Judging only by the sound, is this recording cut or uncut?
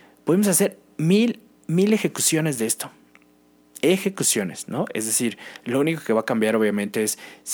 uncut